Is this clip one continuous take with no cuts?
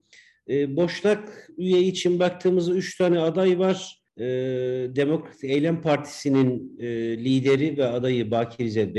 no; 1 cut; at 4.1 s

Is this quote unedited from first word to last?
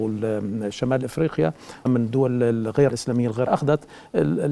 no; 3 cuts; at 1.9 s, 2.9 s, 3.5 s

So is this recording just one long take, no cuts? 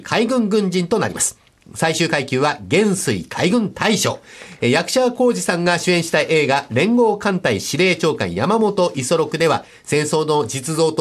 yes; 0 cuts

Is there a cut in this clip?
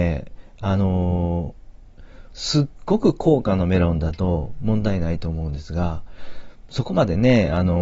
yes; 1 cut; at 2.3 s

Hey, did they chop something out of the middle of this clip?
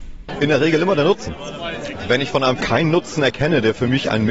yes; 1 cut; at 2.6 s

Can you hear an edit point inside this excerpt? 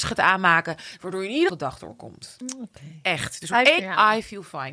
yes; 2 cuts; at 1.5 s, 3.8 s

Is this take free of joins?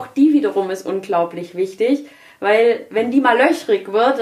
yes; 0 cuts

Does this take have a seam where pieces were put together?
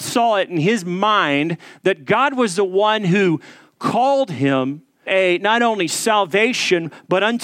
yes; 1 cut; at 5.1 s

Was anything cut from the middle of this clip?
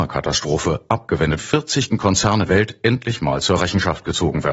yes; 3 cuts; at 1.4 s, 1.9 s, 2.5 s

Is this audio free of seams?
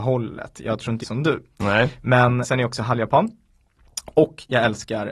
no; 2 cuts; at 1.0 s, 2.4 s

